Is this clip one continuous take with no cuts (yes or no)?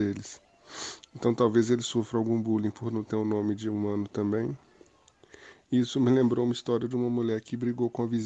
yes